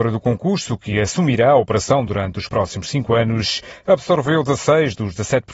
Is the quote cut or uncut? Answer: uncut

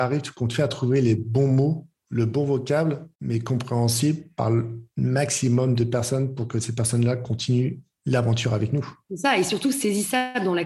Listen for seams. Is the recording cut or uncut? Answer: cut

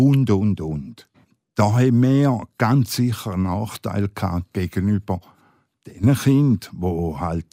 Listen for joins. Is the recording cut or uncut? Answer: uncut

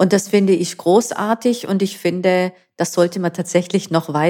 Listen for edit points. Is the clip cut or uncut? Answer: uncut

